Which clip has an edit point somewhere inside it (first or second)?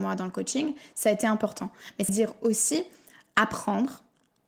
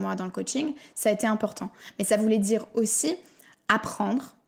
first